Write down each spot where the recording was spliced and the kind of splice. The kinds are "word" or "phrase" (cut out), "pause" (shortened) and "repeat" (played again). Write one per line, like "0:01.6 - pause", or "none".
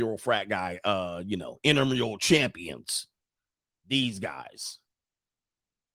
none